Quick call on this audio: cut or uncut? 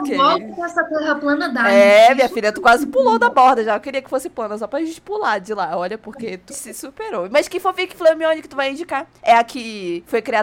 cut